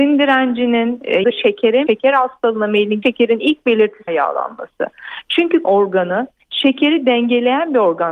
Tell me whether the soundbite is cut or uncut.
cut